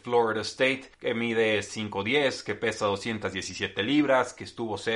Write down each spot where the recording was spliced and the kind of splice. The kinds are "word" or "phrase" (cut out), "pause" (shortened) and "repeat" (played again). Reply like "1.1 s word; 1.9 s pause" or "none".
0.9 s pause